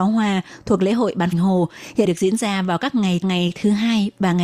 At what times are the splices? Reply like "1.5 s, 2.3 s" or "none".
1.3 s, 2.0 s, 3.2 s